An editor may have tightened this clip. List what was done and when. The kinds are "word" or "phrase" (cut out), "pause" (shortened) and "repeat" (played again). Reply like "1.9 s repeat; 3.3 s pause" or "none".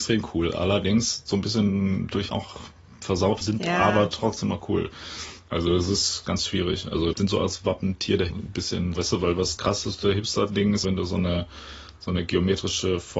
2.3 s word; 3.4 s word; 6.2 s word; 7.1 s word; 8.3 s word; 9.0 s word; 9.6 s word; 10.8 s word